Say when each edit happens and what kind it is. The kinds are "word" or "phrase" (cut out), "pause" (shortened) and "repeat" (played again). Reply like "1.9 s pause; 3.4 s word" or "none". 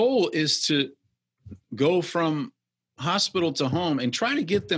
none